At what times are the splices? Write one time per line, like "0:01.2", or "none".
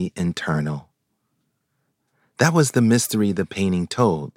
none